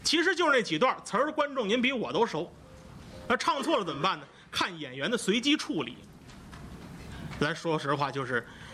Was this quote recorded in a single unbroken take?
yes; 0 cuts

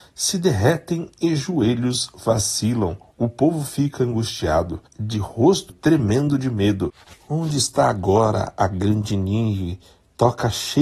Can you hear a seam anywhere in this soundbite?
yes; 2 cuts; at 4.9 s, 5.7 s

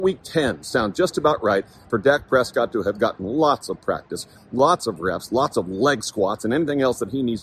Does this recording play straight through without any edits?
yes; 0 cuts

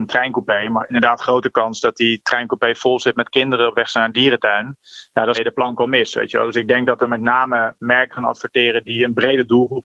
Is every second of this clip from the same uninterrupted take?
no; 1 cut; at 5.3 s

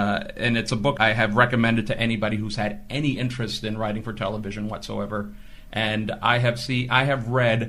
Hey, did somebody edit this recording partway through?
yes; 1 cut; at 1.0 s

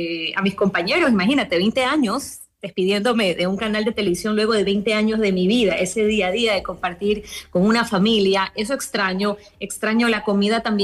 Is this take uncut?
yes; 0 cuts

